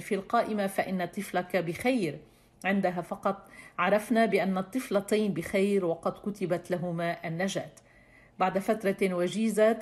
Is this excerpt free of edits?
yes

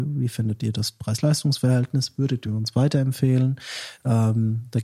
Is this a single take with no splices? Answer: yes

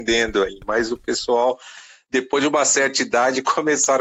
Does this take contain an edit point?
no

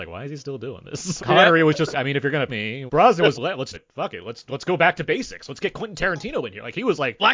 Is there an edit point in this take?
yes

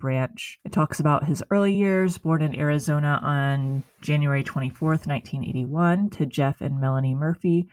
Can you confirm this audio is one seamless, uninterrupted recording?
yes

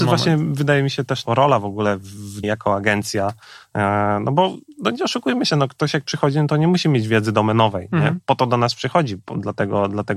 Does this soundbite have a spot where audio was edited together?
yes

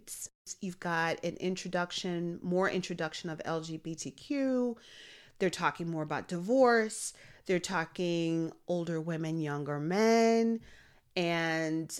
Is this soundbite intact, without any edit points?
yes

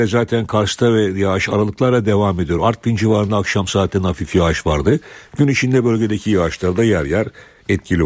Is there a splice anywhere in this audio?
no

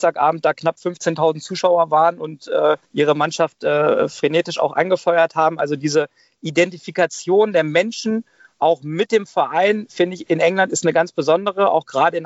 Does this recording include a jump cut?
yes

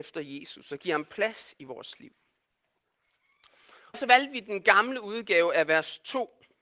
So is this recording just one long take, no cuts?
no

